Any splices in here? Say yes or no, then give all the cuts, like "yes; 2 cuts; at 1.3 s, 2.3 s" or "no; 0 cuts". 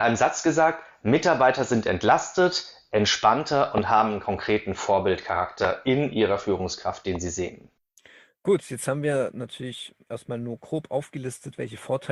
no; 0 cuts